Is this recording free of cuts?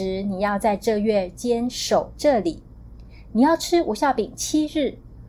yes; 0 cuts

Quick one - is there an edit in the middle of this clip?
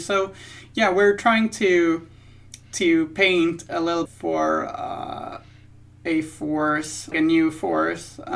yes; 2 cuts; at 4.0 s, 7.1 s

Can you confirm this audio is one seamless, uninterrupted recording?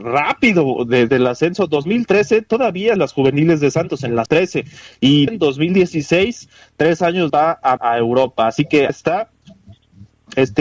no; 7 cuts; at 1.1 s, 3.0 s, 4.3 s, 5.3 s, 7.3 s, 7.8 s, 8.9 s

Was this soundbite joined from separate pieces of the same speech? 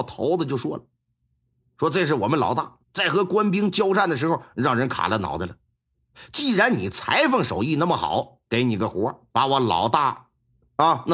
yes; 3 cuts; at 2.8 s, 8.5 s, 9.3 s

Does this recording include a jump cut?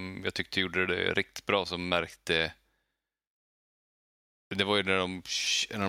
no; 0 cuts

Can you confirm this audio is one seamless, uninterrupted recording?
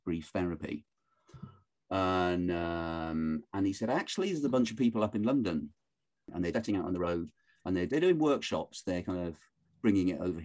no; 2 cuts; at 6.5 s, 7.9 s

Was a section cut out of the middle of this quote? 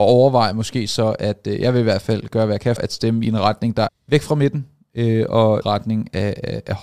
yes; 3 cuts; at 2.8 s, 3.9 s, 5.6 s

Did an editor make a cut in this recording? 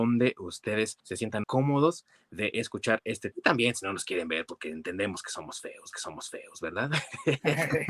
yes; 4 cuts; at 1.0 s, 1.4 s, 3.3 s, 5.9 s

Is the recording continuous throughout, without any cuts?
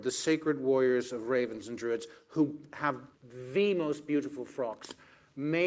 no; 1 cut; at 3.1 s

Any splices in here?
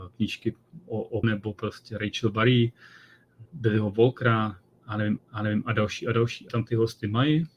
yes; 4 cuts; at 1.2 s, 3.5 s, 5.2 s, 6.5 s

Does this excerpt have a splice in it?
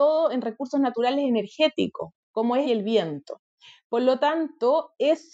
yes; 1 cut; at 2.6 s

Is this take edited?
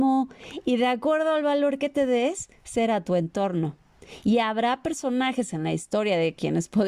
no; 0 cuts

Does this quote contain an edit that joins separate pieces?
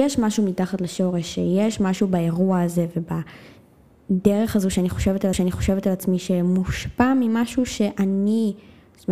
yes; 1 cut; at 5.3 s

